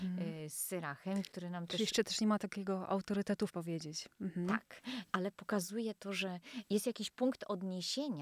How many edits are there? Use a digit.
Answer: 1